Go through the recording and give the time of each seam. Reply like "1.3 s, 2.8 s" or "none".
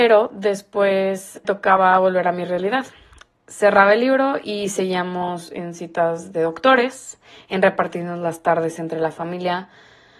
1.4 s